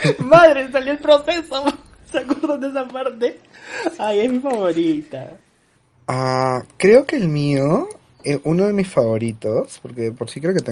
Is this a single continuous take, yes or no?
yes